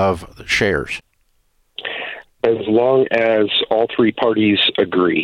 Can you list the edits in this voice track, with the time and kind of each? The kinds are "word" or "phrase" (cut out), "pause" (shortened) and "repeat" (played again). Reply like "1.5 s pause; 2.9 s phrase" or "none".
none